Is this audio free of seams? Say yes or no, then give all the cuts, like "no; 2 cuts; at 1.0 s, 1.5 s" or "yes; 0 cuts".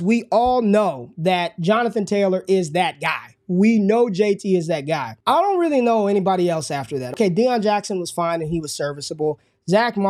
yes; 0 cuts